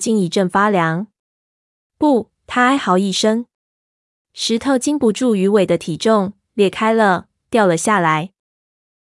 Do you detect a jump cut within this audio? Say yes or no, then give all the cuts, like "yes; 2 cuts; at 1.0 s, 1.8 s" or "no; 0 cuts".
no; 0 cuts